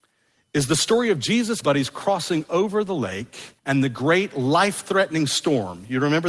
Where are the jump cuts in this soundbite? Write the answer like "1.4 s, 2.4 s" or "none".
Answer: 1.6 s, 3.6 s